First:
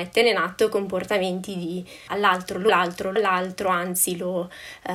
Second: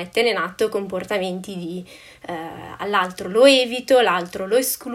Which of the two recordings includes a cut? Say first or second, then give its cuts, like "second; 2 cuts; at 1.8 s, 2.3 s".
first; 3 cuts; at 2.1 s, 2.7 s, 3.2 s